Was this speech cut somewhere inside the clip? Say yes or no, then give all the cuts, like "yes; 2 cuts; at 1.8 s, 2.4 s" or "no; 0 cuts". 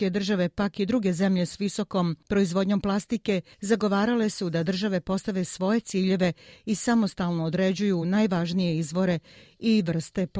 no; 0 cuts